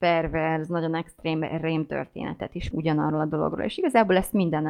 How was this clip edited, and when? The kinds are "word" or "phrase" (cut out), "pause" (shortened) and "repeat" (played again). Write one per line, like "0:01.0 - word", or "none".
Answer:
0:02.7 - word